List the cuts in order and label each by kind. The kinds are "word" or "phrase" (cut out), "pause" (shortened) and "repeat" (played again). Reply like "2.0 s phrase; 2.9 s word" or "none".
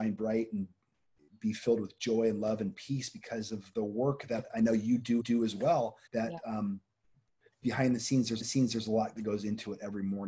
5.2 s repeat; 6.1 s pause; 8.4 s repeat

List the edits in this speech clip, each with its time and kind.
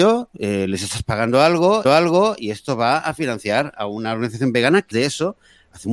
1.8 s repeat; 4.9 s word

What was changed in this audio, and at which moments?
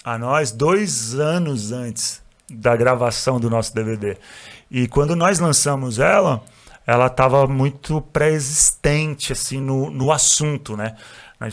none

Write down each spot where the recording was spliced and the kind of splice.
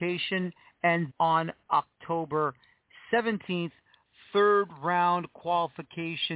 1.1 s word

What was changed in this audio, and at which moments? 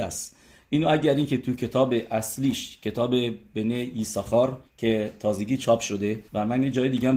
4.7 s pause; 6.3 s pause

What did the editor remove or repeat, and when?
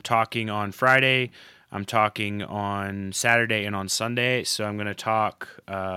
none

